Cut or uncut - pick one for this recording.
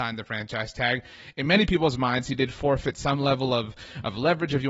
uncut